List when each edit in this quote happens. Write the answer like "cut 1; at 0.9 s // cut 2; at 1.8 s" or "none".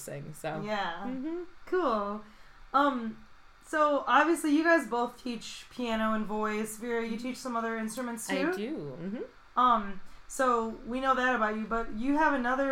none